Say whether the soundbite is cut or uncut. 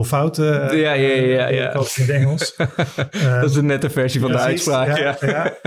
uncut